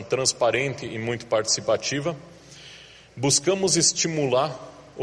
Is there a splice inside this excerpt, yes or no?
no